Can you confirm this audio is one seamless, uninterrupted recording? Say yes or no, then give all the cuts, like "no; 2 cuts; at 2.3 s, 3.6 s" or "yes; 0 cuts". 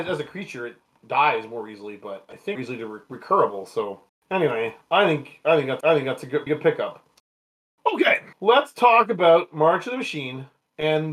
no; 5 cuts; at 2.6 s, 4.1 s, 5.8 s, 6.5 s, 8.3 s